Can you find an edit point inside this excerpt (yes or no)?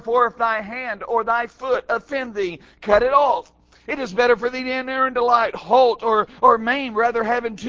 no